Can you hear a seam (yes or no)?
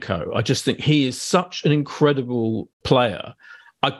yes